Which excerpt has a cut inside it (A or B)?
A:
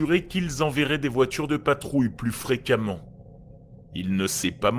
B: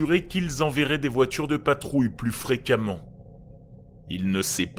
A